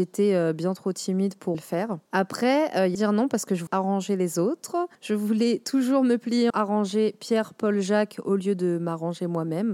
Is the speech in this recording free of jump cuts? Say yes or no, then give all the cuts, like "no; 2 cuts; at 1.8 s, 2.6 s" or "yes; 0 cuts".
no; 6 cuts; at 1.5 s, 2.1 s, 2.9 s, 3.7 s, 4.9 s, 6.5 s